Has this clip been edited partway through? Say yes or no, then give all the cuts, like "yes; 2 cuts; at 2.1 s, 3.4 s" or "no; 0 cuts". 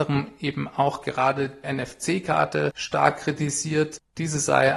yes; 1 cut; at 1.6 s